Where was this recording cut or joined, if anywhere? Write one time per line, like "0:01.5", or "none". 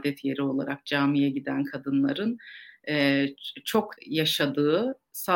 0:04.0